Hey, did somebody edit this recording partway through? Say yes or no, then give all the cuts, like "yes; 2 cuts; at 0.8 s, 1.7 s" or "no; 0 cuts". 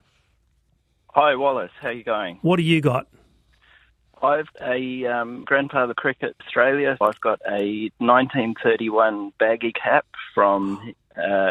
yes; 6 cuts; at 4.5 s, 5.4 s, 5.9 s, 6.4 s, 7.0 s, 9.7 s